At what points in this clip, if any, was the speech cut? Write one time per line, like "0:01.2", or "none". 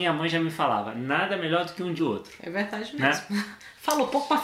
0:02.0